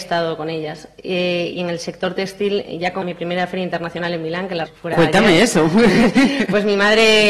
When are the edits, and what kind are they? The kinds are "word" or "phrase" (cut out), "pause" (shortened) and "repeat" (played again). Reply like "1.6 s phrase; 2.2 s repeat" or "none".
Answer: 3.0 s phrase; 4.7 s phrase